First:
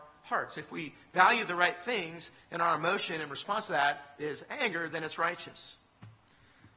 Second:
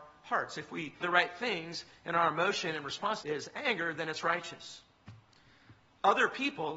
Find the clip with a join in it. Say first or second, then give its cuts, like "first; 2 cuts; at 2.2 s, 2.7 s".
second; 2 cuts; at 1.0 s, 3.2 s